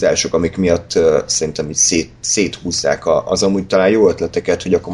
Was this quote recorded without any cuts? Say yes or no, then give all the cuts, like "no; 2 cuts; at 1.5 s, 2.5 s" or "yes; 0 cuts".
yes; 0 cuts